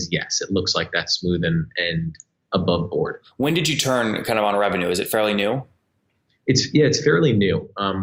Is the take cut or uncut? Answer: uncut